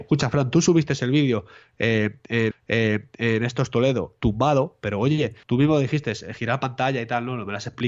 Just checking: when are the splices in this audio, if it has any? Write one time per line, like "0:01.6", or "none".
0:02.5
0:04.2
0:05.4